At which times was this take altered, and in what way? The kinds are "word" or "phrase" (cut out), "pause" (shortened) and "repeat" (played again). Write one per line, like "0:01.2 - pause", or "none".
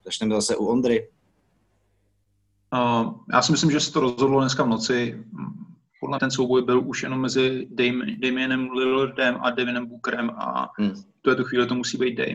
0:06.2 - word